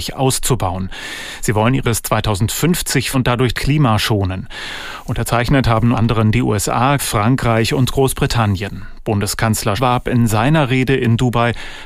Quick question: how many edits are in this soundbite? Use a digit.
6